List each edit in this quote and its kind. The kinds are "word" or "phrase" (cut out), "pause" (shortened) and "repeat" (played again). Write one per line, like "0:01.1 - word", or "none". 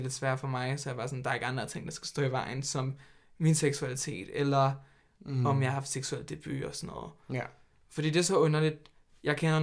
none